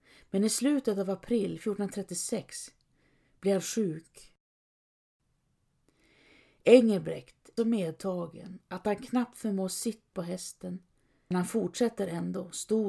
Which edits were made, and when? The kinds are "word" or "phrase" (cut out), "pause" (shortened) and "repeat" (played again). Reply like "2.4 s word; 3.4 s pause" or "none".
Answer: 7.6 s word; 10.1 s word; 11.3 s word